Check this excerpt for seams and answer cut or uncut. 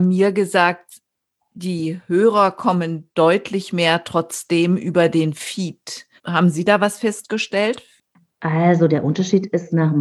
cut